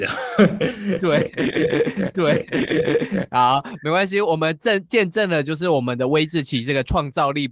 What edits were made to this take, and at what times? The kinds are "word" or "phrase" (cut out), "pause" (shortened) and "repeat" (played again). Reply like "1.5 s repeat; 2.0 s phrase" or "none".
2.1 s repeat